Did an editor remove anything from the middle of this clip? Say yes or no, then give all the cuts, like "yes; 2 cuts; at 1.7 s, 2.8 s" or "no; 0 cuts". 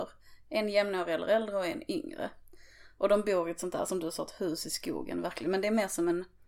no; 0 cuts